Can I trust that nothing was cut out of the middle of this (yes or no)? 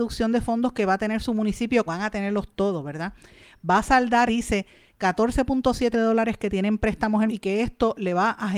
no